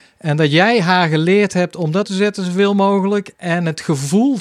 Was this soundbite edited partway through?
yes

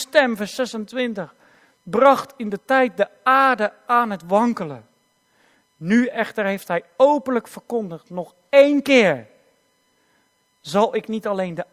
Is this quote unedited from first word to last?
yes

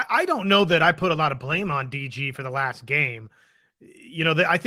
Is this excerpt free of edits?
yes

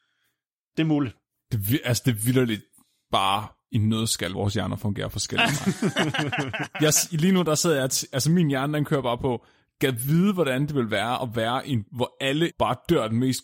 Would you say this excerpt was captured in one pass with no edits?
no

